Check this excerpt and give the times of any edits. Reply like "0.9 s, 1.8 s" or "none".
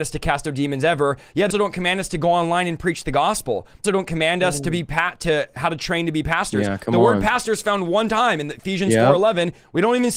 1.5 s, 3.8 s